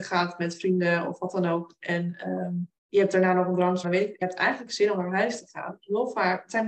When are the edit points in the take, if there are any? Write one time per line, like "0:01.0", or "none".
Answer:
0:02.8
0:03.8
0:04.2